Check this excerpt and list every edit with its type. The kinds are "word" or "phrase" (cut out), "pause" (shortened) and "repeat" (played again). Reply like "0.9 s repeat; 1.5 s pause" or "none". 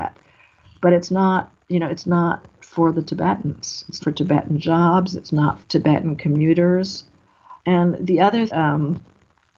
1.6 s pause; 4.0 s word; 5.6 s word; 7.6 s pause; 8.5 s phrase